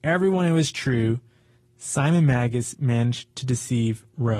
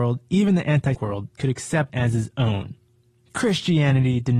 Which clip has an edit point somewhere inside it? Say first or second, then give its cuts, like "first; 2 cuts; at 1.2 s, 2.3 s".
second; 2 cuts; at 0.9 s, 1.9 s